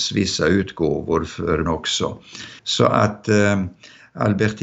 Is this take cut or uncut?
cut